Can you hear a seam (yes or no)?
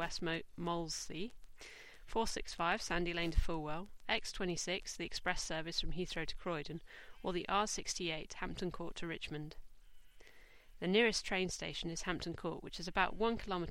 no